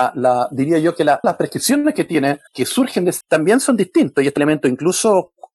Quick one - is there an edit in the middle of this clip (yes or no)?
yes